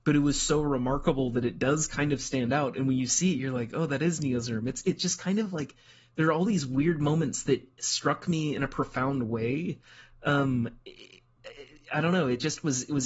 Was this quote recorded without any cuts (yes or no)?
yes